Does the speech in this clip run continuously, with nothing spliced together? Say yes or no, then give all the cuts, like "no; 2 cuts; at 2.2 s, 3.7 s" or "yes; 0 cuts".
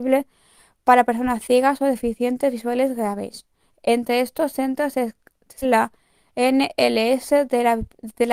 no; 1 cut; at 5.6 s